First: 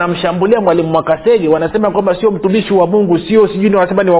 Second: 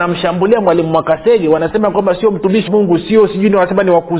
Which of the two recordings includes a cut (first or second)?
second